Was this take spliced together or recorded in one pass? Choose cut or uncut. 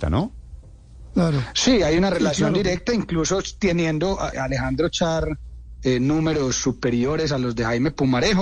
cut